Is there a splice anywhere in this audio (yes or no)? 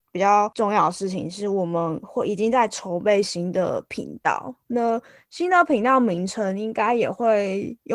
no